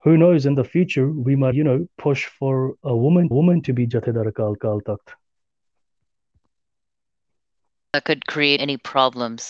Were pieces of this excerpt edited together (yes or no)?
yes